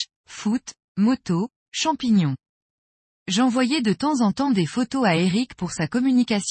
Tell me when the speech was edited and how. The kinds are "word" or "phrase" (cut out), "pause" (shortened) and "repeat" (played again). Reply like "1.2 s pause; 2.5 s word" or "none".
none